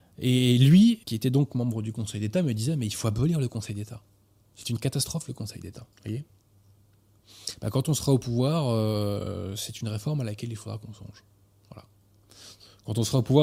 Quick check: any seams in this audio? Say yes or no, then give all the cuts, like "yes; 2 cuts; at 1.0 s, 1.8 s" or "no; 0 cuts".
yes; 2 cuts; at 1.0 s, 5.9 s